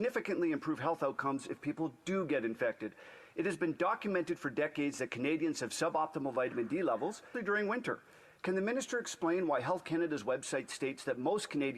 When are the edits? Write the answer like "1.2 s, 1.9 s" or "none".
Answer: 7.3 s